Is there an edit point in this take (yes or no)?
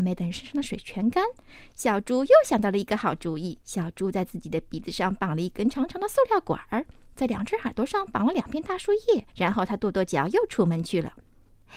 yes